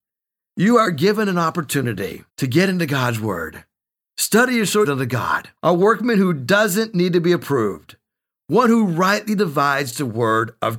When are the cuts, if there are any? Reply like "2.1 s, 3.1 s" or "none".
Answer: 2.3 s, 4.0 s, 4.8 s, 5.6 s